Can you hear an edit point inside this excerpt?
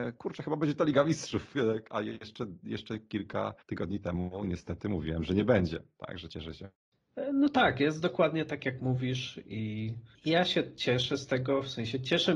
yes; 2 cuts; at 3.6 s, 10.2 s

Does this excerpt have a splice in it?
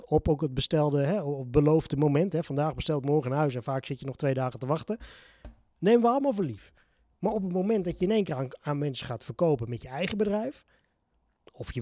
no; 0 cuts

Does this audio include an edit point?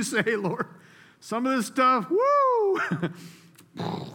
no; 0 cuts

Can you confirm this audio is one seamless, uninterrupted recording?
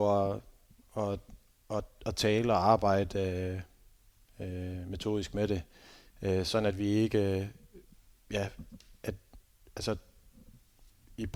yes; 0 cuts

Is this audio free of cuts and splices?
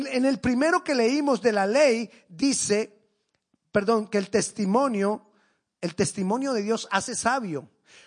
yes; 0 cuts

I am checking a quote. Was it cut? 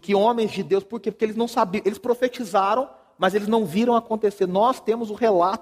no; 0 cuts

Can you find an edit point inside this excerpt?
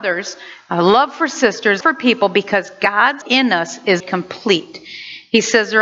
yes; 3 cuts; at 1.8 s, 3.2 s, 4.0 s

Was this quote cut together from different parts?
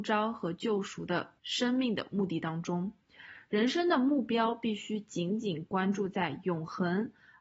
yes; 1 cut; at 1.4 s

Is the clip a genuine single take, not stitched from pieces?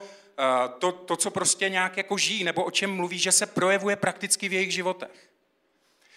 yes; 0 cuts

